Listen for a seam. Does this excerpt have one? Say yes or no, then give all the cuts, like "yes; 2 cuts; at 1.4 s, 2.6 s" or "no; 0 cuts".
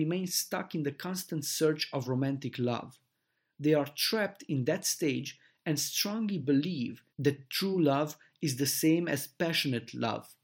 no; 0 cuts